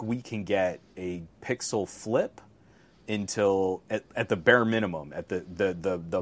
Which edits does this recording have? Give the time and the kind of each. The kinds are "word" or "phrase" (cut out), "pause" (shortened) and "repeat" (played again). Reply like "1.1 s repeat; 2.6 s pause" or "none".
none